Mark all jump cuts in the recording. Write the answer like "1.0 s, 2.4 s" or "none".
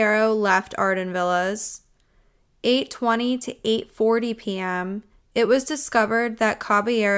5.1 s